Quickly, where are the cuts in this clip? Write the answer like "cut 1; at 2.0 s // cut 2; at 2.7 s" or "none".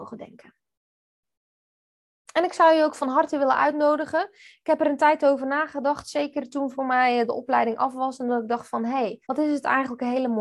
cut 1; at 9.2 s